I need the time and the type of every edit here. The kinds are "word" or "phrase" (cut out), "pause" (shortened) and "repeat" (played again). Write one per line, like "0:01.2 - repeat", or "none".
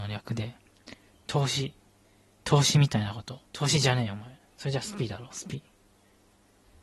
0:03.5 - pause